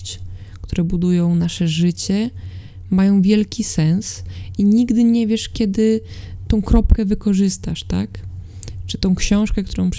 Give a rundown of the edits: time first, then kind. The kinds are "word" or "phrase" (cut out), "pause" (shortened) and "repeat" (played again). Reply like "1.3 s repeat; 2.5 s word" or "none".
none